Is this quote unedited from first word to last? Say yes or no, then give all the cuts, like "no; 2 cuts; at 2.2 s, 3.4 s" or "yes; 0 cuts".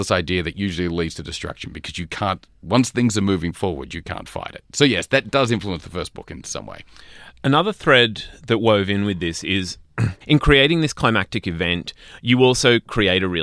no; 1 cut; at 10.2 s